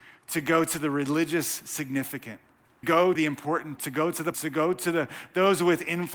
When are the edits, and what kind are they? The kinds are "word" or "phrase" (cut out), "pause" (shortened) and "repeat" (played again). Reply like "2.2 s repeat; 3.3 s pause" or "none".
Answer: 2.8 s word; 3.1 s word; 3.8 s word; 4.3 s word